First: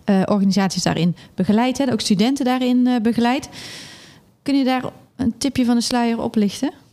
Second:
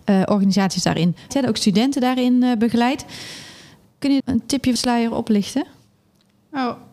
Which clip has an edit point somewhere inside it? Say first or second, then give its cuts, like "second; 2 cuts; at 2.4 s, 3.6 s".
second; 3 cuts; at 1.3 s, 4.2 s, 4.8 s